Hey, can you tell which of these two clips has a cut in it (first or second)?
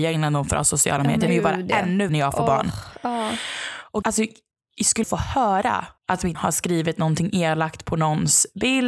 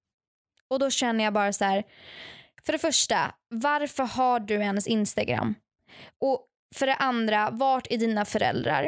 first